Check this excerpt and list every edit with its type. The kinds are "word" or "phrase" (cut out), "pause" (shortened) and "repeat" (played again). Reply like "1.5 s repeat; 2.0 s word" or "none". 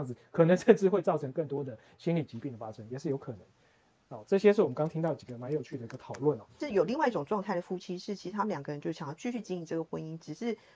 none